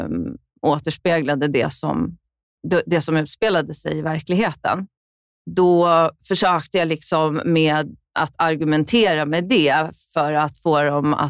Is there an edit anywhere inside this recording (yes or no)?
no